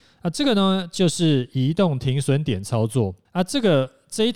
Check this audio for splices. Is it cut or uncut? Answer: cut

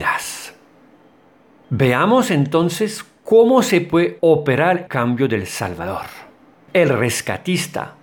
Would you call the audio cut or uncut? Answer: cut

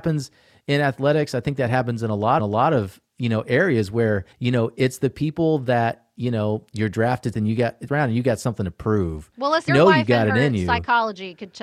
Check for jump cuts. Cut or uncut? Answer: cut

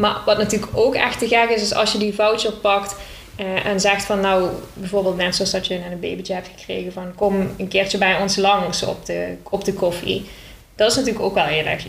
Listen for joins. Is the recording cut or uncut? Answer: uncut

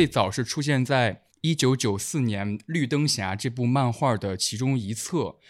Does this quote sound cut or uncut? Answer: cut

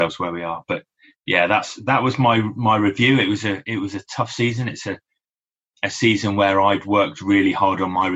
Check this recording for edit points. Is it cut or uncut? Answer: uncut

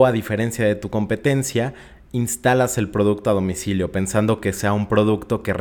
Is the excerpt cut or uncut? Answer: uncut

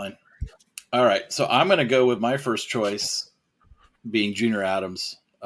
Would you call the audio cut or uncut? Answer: uncut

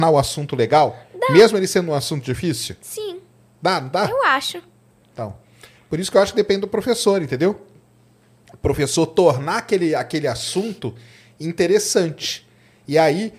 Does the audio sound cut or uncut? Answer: uncut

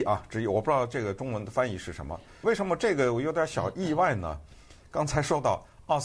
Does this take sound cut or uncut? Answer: cut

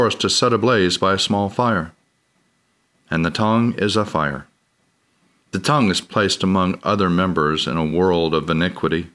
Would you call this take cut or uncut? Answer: uncut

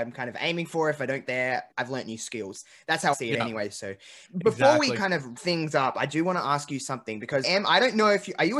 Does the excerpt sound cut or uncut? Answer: cut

